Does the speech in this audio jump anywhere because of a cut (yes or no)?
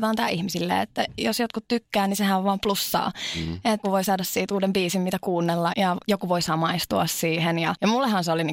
yes